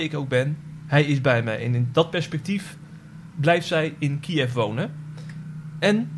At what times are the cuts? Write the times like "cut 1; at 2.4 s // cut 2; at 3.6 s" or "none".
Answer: none